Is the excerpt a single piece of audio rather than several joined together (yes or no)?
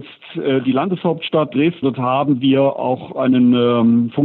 no